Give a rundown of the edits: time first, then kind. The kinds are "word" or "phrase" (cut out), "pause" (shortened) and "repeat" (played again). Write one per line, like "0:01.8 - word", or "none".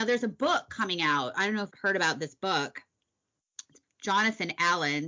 0:01.7 - word
0:03.8 - word